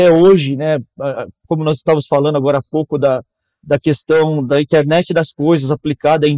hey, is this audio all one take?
yes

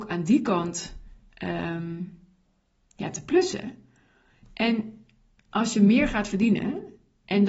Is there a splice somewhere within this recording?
no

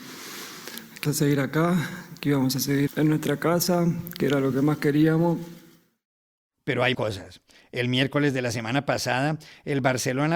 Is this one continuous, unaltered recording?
no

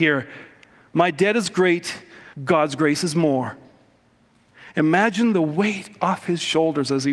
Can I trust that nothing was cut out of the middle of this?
no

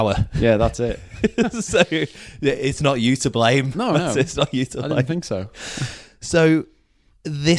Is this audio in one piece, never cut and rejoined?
yes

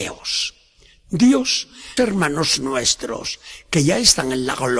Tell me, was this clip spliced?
yes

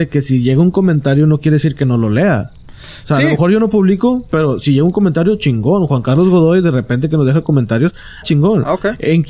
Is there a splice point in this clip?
yes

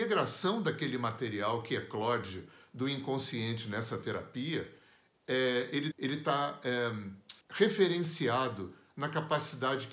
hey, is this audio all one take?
no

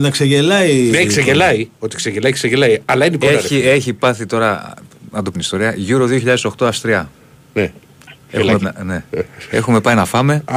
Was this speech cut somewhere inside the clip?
yes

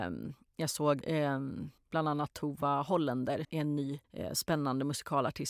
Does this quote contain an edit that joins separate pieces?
yes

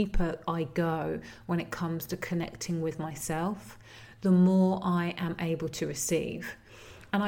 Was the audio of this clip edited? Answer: no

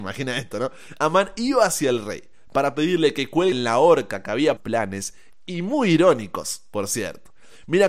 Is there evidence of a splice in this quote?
yes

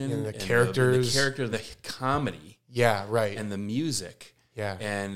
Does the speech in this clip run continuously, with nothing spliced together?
no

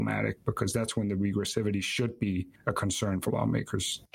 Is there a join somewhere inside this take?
no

